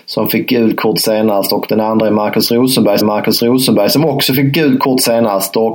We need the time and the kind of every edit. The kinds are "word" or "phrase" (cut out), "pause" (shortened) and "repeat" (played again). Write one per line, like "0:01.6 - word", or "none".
0:03.0 - repeat